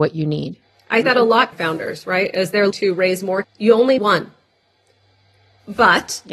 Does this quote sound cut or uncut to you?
cut